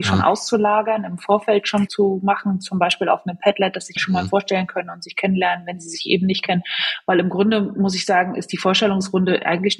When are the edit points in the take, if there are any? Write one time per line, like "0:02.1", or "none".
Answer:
0:01.9
0:04.0